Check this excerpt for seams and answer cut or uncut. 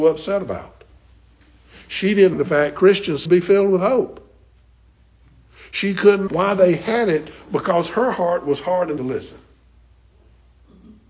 cut